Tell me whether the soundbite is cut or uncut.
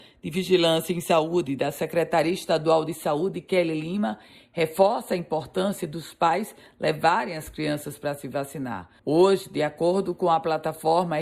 cut